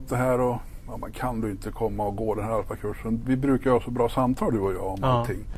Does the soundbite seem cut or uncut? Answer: uncut